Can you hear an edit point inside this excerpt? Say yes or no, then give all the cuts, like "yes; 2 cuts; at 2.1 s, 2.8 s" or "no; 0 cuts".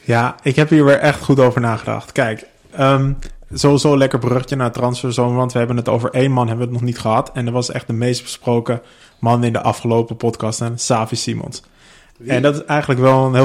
no; 0 cuts